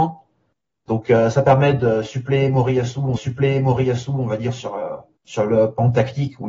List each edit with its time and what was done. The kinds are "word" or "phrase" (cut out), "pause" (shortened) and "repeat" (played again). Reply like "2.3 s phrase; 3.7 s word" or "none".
3.2 s repeat; 5.2 s pause